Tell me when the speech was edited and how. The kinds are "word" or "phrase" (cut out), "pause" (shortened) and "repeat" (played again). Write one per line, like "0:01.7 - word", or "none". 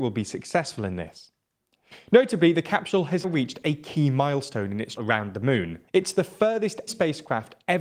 0:03.2 - word
0:05.0 - word
0:05.9 - pause
0:06.9 - word